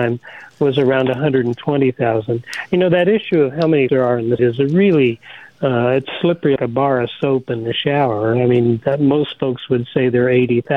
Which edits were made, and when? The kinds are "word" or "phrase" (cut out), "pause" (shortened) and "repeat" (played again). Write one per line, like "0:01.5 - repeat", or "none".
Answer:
0:03.9 - word
0:04.4 - word
0:06.6 - word